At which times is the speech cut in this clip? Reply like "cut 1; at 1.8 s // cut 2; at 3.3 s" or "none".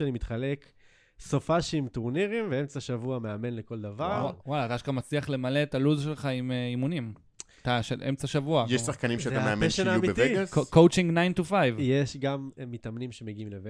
none